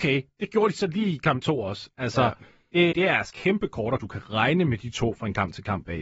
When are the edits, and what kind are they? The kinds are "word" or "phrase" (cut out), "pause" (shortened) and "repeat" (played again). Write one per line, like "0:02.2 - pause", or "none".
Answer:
0:02.9 - word
0:03.3 - word
0:04.0 - phrase

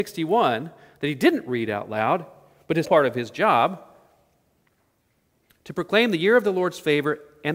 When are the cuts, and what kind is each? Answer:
0:02.8 - word

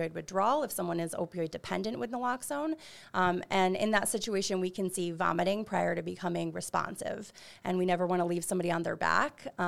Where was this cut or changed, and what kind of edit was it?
none

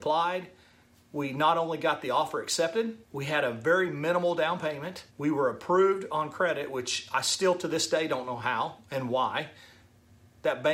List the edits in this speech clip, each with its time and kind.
0:03.0 - pause
0:05.1 - pause

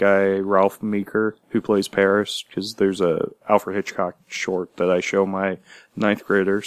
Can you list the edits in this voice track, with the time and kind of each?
0:01.4 - pause
0:03.4 - word

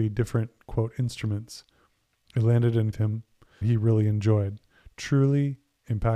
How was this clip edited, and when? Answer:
0:02.9 - phrase
0:03.6 - phrase

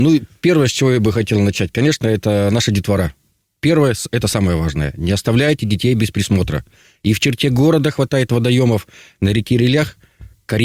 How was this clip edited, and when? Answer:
none

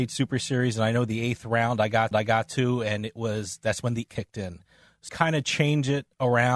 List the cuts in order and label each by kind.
0:02.1 - repeat
0:04.1 - word
0:05.1 - word

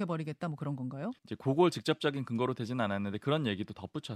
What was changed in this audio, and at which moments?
0:01.2 - pause

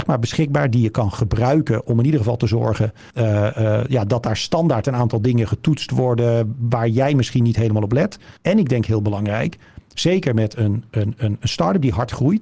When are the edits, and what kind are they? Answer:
0:03.1 - pause
0:08.4 - pause

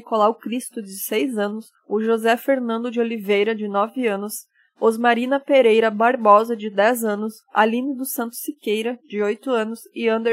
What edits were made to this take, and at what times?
0:01.8 - pause

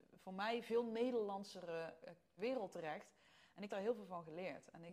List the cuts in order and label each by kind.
0:02.4 - word
0:03.7 - word

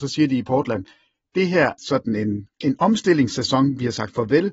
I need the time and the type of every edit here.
0:01.8 - phrase
0:02.5 - pause

